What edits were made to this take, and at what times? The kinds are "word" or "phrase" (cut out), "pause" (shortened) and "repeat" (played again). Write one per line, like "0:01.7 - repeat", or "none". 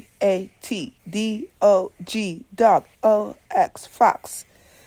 0:01.0 - word
0:02.9 - word